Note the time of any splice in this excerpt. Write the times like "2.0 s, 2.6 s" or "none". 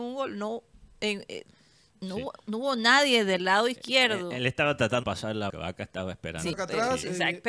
5.0 s, 5.5 s, 6.5 s